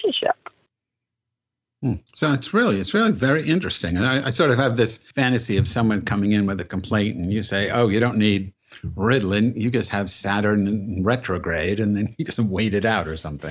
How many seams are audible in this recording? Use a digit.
2